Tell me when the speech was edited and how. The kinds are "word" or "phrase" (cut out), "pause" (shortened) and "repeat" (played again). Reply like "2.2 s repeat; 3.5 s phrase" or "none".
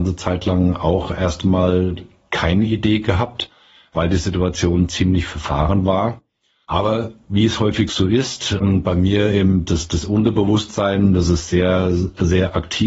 none